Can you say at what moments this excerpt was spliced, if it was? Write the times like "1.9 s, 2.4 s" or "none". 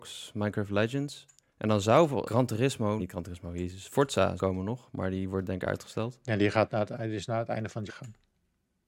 1.5 s, 2.2 s, 3.0 s, 4.4 s, 7.9 s